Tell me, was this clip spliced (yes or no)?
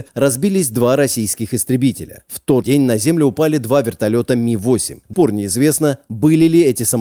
yes